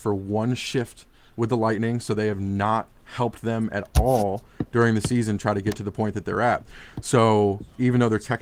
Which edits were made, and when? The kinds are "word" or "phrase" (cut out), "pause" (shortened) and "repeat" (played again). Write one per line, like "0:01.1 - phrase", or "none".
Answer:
none